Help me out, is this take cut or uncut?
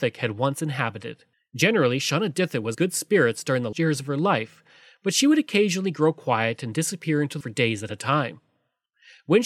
cut